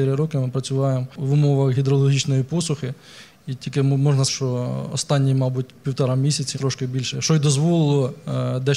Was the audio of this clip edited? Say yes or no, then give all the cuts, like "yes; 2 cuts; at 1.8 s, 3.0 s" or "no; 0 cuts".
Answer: yes; 3 cuts; at 4.3 s, 6.5 s, 7.1 s